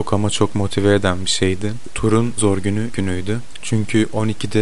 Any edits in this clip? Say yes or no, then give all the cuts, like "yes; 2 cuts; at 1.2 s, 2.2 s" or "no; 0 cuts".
yes; 2 cuts; at 2.4 s, 2.9 s